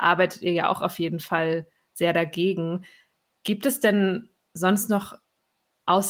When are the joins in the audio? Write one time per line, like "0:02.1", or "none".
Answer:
none